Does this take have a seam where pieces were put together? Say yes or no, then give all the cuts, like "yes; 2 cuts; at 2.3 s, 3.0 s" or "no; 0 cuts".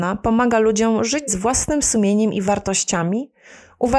yes; 1 cut; at 1.3 s